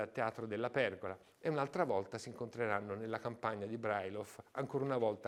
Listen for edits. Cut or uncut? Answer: uncut